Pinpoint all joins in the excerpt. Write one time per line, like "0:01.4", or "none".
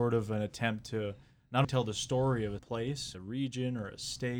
0:01.6
0:02.6
0:03.1